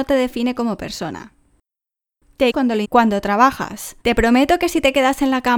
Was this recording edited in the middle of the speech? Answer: yes; 3 cuts; at 2.5 s, 2.8 s, 4.0 s

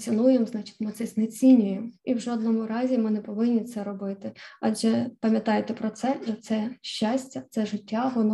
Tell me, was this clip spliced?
yes; 3 cuts; at 2.0 s, 5.1 s, 6.3 s

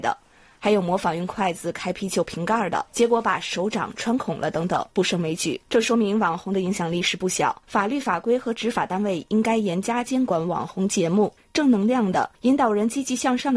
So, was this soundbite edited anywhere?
yes; 6 cuts; at 2.9 s, 4.9 s, 5.7 s, 7.6 s, 11.4 s, 12.3 s

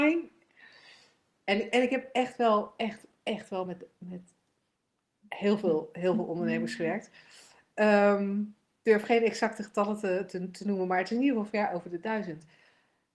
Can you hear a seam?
no; 0 cuts

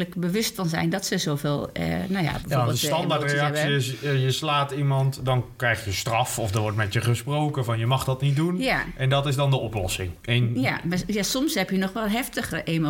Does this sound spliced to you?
no; 0 cuts

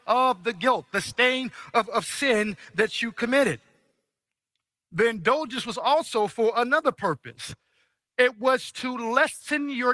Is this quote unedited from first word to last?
yes; 0 cuts

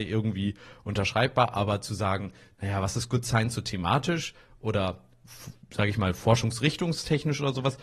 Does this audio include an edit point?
no; 0 cuts

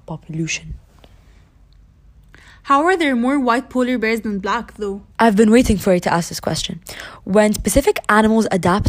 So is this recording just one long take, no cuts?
no; 1 cut; at 5.1 s

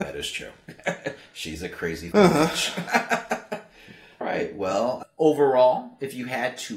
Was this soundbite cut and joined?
yes; 3 cuts; at 2.1 s, 4.2 s, 5.0 s

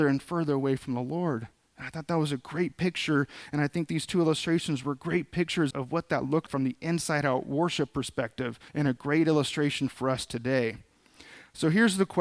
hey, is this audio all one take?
no; 3 cuts; at 5.7 s, 6.5 s, 8.7 s

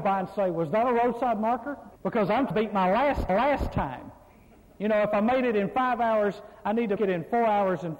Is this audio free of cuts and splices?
no; 4 cuts; at 2.0 s, 2.5 s, 3.3 s, 7.0 s

